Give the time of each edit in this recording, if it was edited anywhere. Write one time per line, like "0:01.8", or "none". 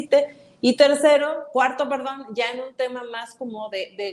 none